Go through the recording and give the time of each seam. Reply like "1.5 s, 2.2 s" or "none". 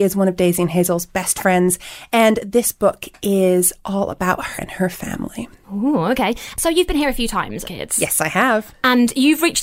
4.6 s, 7.7 s